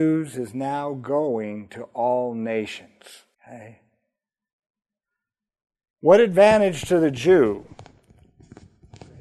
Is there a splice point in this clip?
yes; 1 cut; at 3.3 s

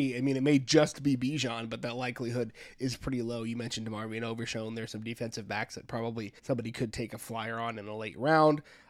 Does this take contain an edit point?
yes; 1 cut; at 6.4 s

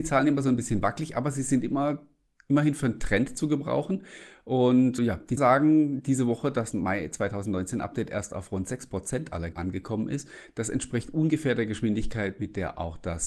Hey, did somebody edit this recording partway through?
yes; 4 cuts; at 5.0 s, 5.4 s, 6.7 s, 9.5 s

